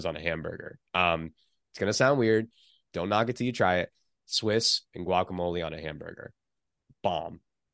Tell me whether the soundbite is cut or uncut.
uncut